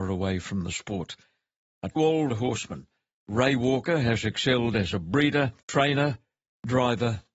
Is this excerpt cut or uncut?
cut